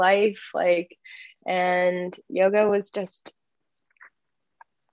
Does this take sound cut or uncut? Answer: uncut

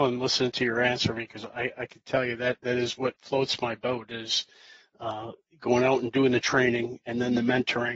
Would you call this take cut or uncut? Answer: uncut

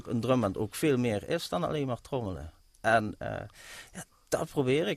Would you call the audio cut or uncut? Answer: uncut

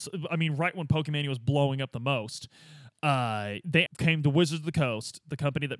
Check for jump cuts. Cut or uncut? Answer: cut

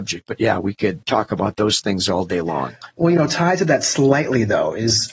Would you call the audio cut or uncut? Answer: cut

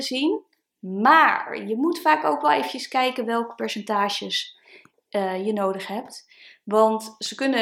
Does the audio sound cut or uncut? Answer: uncut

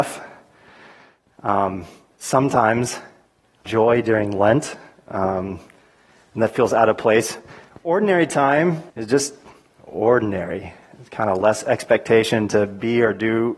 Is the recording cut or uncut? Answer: cut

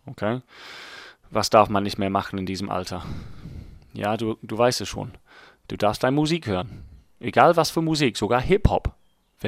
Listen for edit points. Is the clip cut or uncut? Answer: uncut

